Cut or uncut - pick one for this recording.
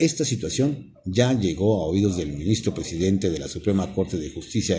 uncut